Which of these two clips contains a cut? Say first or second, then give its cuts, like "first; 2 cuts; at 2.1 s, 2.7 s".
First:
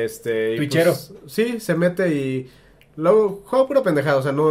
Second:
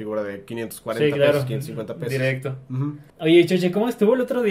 second; 1 cut; at 3.1 s